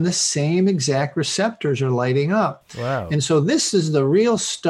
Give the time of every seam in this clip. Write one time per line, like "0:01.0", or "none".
none